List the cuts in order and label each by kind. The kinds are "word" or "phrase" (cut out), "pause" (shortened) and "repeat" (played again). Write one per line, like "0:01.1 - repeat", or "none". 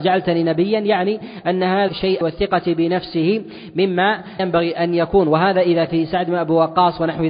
0:01.9 - phrase
0:02.2 - phrase
0:04.4 - word
0:05.9 - word